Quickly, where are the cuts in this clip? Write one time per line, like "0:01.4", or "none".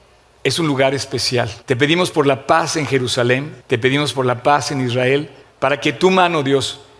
0:01.6
0:03.6
0:05.4

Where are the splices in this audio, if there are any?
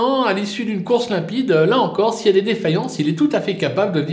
none

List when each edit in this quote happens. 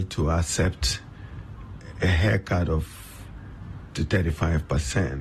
0:03.9

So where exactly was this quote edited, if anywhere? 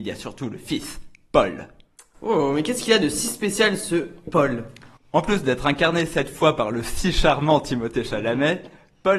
none

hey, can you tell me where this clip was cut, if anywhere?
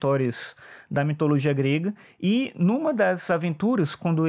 none

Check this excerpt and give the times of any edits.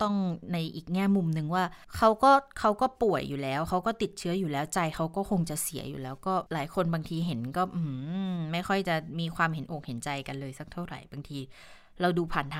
0:01.8
0:06.5

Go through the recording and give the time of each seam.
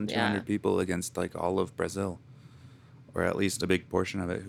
none

